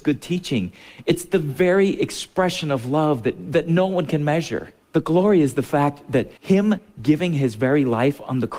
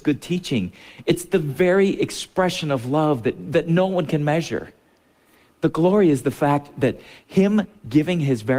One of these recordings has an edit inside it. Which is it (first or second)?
first